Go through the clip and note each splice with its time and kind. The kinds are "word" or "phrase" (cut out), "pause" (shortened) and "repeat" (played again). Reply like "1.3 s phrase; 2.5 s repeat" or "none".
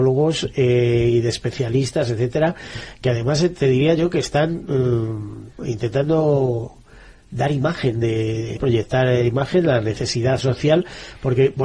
5.6 s word; 8.6 s word